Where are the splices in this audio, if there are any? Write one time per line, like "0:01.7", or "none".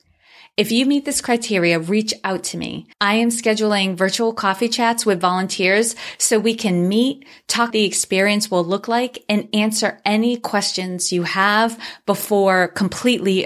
0:02.9
0:07.7